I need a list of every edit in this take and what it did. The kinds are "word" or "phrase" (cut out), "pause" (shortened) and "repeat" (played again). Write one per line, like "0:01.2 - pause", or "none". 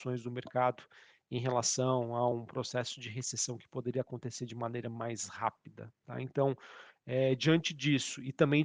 none

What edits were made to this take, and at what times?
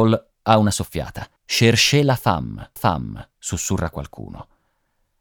0:01.4 - pause
0:02.8 - repeat

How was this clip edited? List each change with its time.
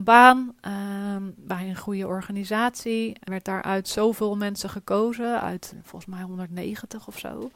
0:03.3 - word

